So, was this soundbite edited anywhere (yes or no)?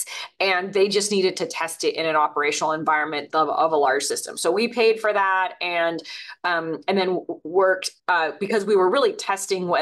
yes